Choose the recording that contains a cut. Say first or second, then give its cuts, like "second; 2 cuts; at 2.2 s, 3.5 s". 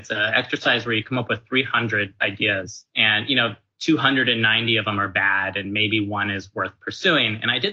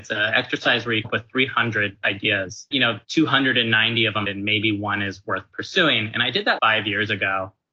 second; 5 cuts; at 1.0 s, 2.7 s, 3.0 s, 4.2 s, 6.6 s